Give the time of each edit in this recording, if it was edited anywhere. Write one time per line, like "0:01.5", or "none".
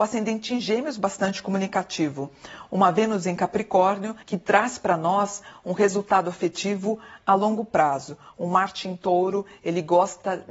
0:04.2